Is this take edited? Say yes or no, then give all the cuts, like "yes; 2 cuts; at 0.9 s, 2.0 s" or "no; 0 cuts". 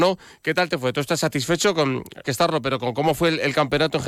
yes; 1 cut; at 2.2 s